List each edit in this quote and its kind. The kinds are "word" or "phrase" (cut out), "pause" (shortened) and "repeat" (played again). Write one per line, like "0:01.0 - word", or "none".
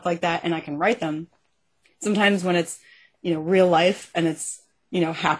none